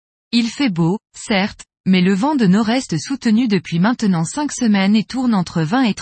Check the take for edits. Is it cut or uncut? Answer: cut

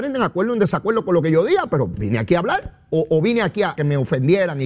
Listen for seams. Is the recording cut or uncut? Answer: cut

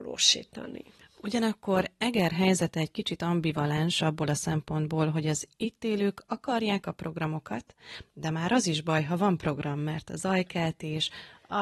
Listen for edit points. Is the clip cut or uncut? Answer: uncut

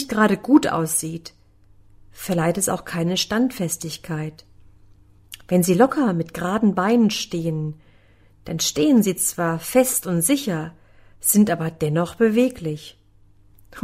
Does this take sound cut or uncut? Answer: uncut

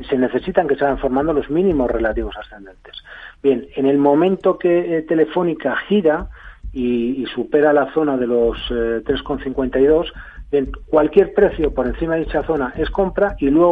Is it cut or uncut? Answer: uncut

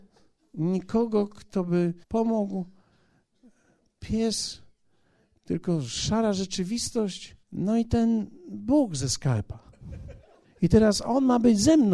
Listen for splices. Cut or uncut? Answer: cut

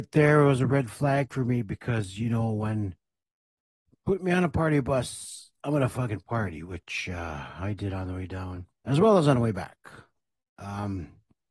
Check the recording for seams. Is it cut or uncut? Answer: cut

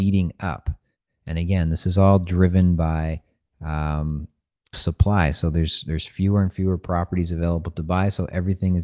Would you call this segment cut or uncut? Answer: cut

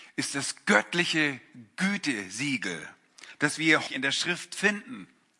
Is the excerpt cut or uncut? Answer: cut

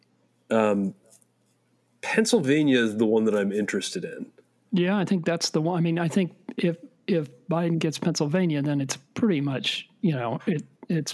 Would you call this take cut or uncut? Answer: uncut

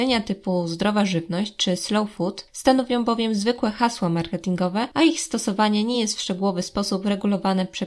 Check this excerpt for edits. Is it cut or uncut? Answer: uncut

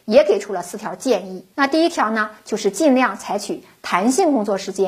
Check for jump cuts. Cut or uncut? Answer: cut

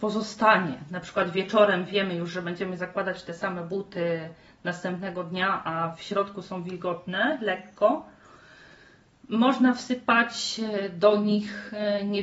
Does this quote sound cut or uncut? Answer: uncut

